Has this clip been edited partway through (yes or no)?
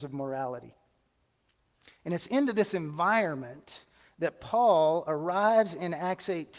no